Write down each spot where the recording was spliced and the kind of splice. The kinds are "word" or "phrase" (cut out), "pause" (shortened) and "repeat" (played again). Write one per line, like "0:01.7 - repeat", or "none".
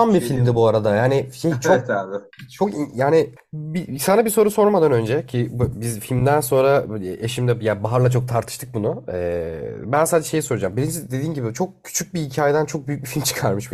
0:03.4 - pause

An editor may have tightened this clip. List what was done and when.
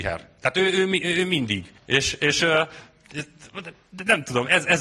0:01.8 - pause

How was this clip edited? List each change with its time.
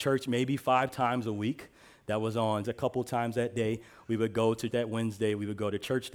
0:02.6 - word
0:04.7 - word

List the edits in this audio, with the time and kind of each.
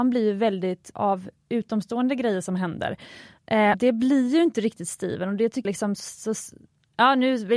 0:00.9 - word
0:03.7 - word
0:05.6 - word

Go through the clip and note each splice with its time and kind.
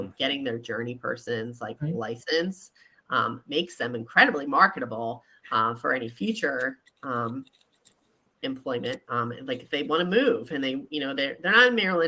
none

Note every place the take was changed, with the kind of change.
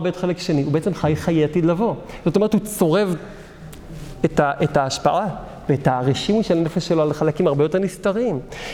none

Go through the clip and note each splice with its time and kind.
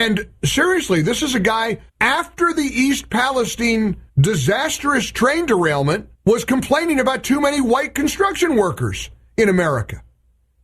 0:01.9 - pause
0:04.1 - pause
0:06.1 - pause

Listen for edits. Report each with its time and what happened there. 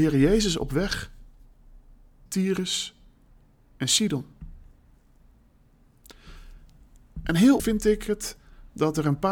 0:02.3 - word
0:07.6 - word

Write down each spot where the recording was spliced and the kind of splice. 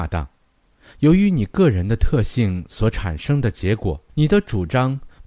0:04.1 - pause

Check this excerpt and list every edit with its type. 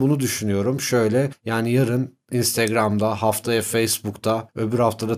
none

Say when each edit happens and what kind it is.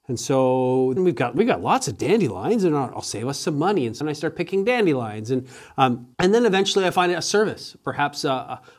0:01.0 - word
0:04.0 - word
0:06.1 - pause

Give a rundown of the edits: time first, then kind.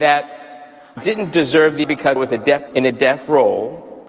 0:01.0 - word
0:01.8 - word
0:02.2 - word
0:02.7 - word

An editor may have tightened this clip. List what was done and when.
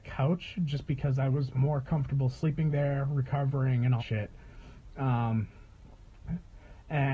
0:04.0 - word

